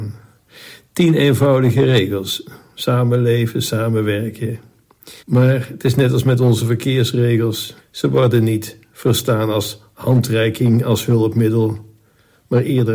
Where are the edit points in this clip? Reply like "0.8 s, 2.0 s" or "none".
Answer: 5.2 s, 7.8 s